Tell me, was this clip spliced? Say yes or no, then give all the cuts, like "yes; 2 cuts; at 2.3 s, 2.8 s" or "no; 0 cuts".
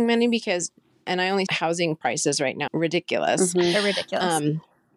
yes; 2 cuts; at 1.5 s, 2.7 s